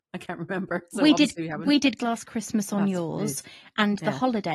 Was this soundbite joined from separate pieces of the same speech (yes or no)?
yes